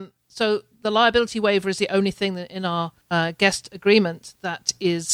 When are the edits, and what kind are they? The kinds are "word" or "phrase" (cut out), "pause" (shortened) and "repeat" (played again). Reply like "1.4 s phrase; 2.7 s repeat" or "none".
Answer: 3.0 s pause